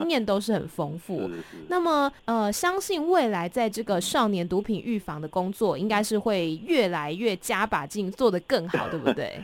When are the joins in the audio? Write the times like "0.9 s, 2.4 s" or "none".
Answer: 2.2 s